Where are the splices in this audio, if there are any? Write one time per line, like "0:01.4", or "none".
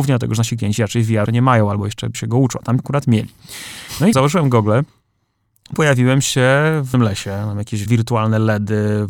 0:01.3
0:02.1
0:02.8
0:04.1
0:05.7
0:06.9
0:07.9

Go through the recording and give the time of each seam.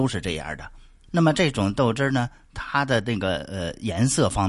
none

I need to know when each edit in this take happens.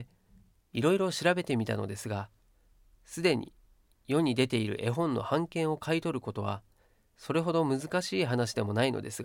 none

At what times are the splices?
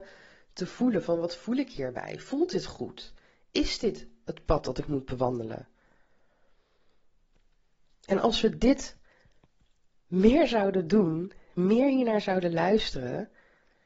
none

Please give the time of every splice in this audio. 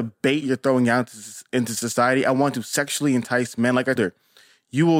0:04.0

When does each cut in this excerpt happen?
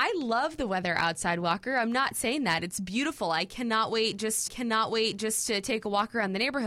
0:04.5

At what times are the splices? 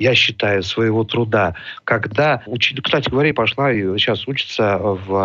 none

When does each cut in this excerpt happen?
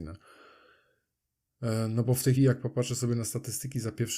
0:02.4

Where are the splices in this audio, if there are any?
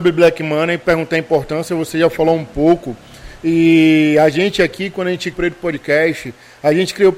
0:05.3

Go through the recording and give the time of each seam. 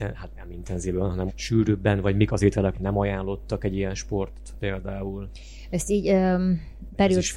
0:01.3
0:02.3
0:02.7
0:04.6

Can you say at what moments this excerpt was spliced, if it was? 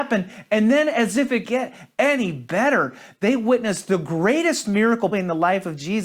0:01.4
0:05.1

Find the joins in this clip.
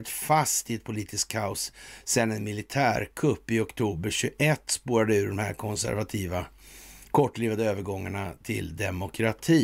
none

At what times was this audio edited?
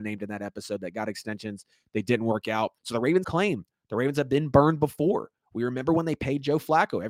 0:02.8
0:03.2

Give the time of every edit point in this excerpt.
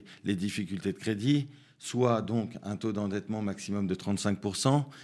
none

